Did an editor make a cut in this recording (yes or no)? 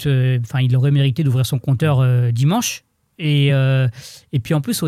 no